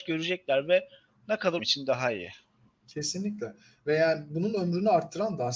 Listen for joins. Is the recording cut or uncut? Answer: cut